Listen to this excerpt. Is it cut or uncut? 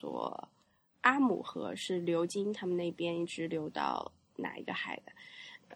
uncut